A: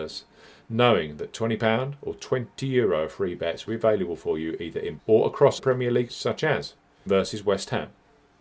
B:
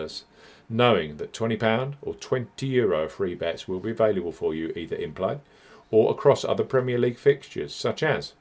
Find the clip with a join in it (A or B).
A